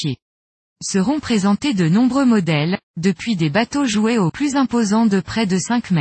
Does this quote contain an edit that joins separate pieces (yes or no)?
yes